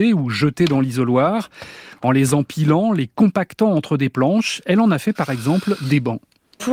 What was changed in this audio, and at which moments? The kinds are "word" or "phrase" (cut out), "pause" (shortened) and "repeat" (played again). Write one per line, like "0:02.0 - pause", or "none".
none